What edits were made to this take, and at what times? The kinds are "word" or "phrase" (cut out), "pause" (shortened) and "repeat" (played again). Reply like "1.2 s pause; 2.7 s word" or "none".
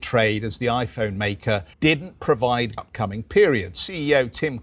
1.7 s pause; 2.8 s phrase

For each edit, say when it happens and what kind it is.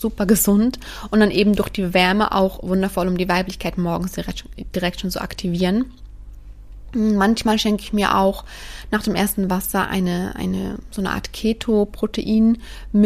none

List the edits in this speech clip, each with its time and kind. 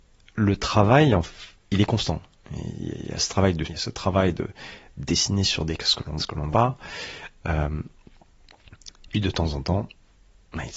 3.6 s phrase; 5.8 s word; 6.2 s word; 6.5 s word; 9.1 s word

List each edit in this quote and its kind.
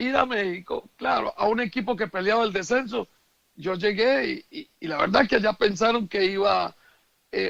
4.7 s word

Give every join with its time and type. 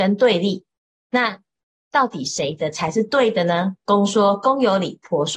none

